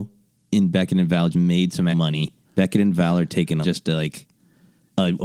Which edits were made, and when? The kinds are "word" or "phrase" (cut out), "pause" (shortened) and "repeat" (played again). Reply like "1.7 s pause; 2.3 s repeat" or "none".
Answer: 1.3 s word; 1.9 s word; 2.4 s pause; 3.6 s phrase